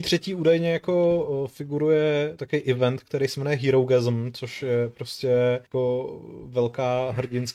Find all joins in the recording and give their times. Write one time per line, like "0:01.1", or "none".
0:05.7